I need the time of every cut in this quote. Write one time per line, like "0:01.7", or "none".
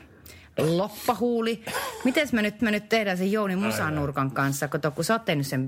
0:02.6